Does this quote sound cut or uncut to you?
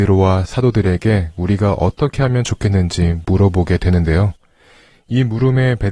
uncut